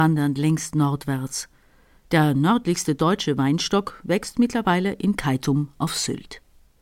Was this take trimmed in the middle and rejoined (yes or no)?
no